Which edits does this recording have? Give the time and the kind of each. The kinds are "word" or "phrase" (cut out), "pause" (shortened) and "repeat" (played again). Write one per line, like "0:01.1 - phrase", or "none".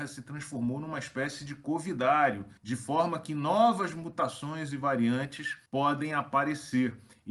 0:02.6 - pause
0:05.7 - pause